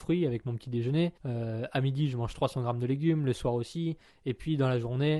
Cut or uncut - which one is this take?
cut